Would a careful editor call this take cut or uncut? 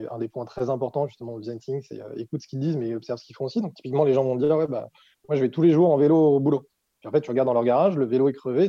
uncut